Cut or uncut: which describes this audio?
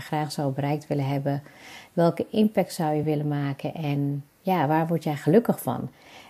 uncut